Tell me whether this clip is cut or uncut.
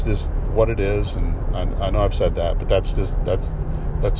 uncut